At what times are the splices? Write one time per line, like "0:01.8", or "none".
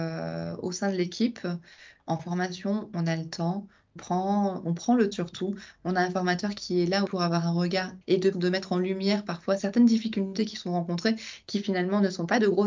0:04.0
0:05.1
0:07.1
0:08.0
0:08.3
0:09.6